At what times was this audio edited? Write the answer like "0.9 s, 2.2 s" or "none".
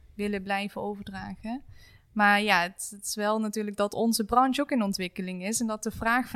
none